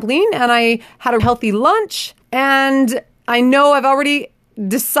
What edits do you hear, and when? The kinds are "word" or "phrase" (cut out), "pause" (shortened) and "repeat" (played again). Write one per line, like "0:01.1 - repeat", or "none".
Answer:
0:01.2 - word
0:02.2 - pause

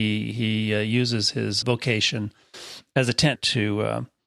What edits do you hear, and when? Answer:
0:01.6 - word
0:03.4 - word

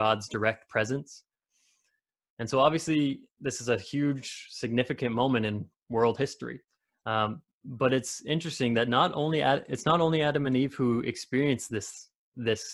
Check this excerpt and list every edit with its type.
none

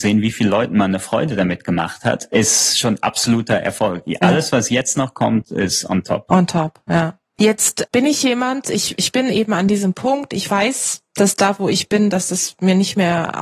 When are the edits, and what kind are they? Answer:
none

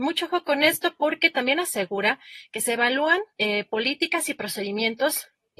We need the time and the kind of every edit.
0:03.3 - pause

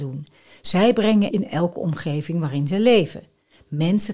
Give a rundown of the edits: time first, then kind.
0:01.3 - word

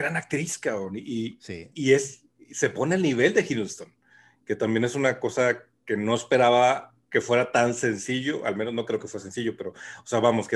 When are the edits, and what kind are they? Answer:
none

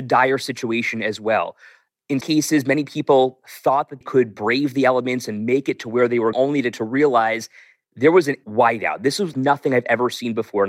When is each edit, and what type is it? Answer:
0:02.2 - word
0:04.0 - word
0:06.3 - word
0:06.7 - word
0:08.4 - word
0:09.3 - word

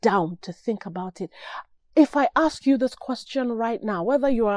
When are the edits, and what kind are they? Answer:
none

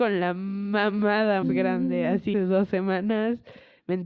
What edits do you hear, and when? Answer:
0:01.4 - word
0:02.3 - word

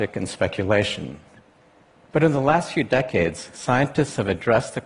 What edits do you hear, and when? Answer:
none

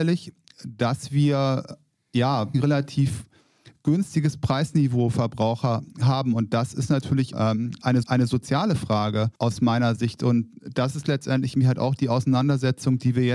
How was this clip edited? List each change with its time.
0:02.5 - word
0:05.1 - word
0:07.3 - phrase
0:08.0 - repeat
0:09.4 - pause

